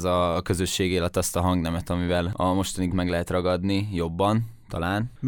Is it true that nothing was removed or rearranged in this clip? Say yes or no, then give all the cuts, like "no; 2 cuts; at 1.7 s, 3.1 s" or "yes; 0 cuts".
no; 1 cut; at 2.9 s